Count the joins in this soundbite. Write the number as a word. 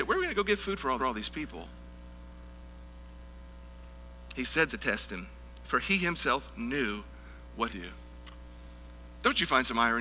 three